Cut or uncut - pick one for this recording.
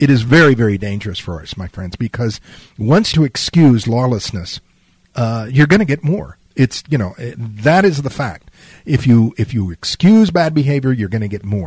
cut